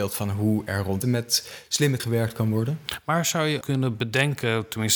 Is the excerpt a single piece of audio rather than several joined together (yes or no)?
no